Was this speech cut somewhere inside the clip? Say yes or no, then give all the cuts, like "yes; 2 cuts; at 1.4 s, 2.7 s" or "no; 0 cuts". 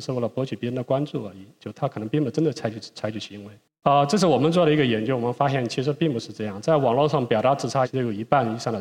no; 0 cuts